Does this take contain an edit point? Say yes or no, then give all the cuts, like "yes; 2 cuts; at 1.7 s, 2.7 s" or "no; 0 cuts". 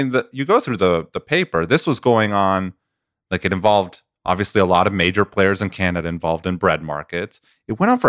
no; 0 cuts